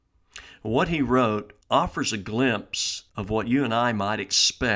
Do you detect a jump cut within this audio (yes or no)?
yes